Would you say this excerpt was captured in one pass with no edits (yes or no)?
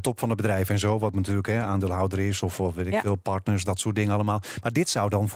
yes